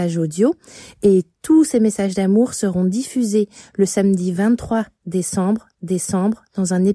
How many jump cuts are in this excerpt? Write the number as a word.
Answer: one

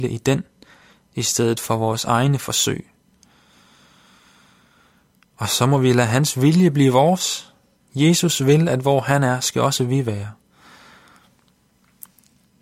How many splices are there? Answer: one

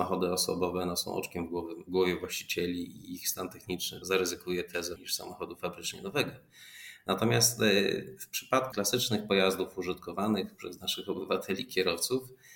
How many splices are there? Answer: four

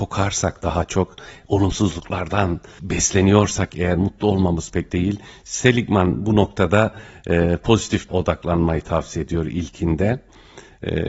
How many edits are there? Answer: three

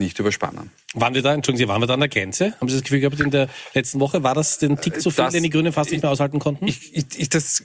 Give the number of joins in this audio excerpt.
zero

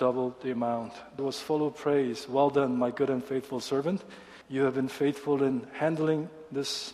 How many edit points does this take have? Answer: two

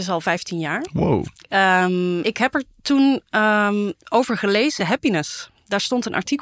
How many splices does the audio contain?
three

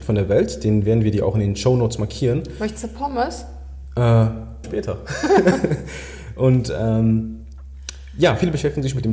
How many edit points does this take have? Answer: one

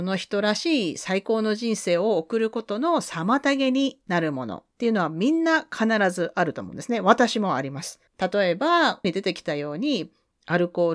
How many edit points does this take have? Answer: two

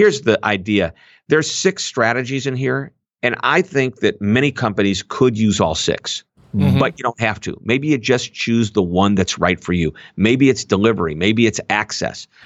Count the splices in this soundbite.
zero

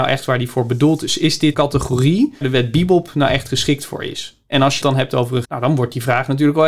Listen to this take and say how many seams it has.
four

